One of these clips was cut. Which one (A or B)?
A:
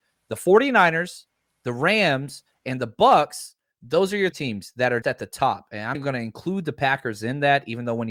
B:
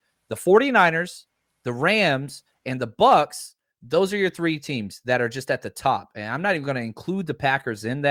A